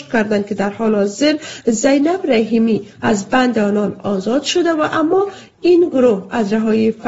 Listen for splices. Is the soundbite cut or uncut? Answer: uncut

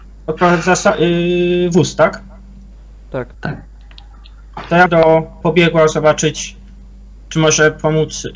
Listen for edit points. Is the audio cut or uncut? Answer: cut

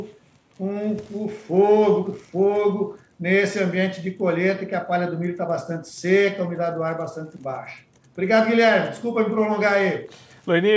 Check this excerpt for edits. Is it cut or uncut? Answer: cut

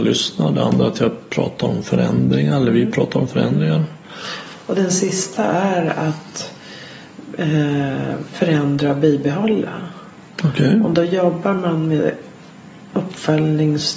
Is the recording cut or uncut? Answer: uncut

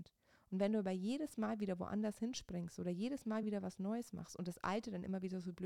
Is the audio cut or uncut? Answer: uncut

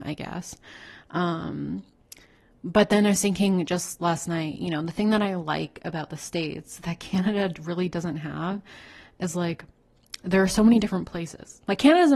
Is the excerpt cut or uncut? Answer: uncut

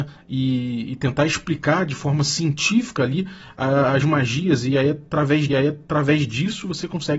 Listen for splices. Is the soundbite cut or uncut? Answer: cut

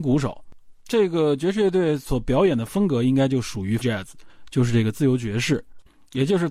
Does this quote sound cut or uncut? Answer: cut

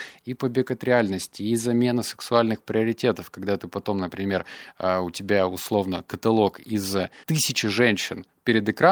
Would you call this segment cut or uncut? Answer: cut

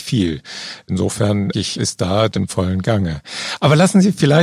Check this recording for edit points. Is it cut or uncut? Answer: cut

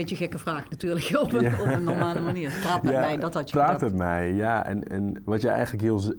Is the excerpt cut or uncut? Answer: cut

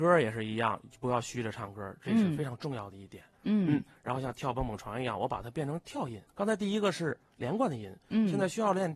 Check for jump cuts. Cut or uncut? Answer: cut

